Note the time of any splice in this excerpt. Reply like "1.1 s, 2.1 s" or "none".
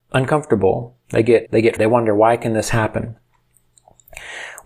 1.5 s, 1.8 s